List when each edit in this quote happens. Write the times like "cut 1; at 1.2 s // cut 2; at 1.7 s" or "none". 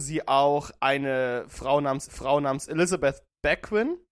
cut 1; at 2.1 s